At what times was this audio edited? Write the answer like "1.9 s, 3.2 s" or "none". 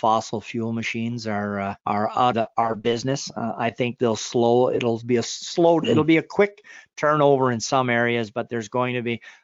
1.8 s, 2.3 s